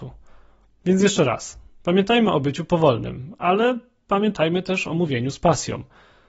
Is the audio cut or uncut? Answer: uncut